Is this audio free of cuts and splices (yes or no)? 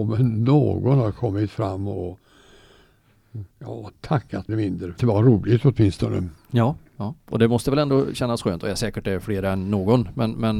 no